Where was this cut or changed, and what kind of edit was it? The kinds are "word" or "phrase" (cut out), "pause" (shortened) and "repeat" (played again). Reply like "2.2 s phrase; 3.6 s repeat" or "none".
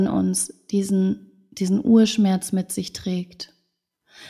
none